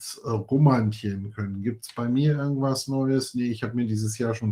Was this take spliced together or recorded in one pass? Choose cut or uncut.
uncut